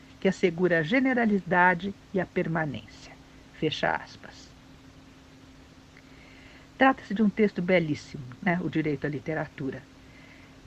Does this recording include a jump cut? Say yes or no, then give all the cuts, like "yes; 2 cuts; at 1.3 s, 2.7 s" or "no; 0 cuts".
no; 0 cuts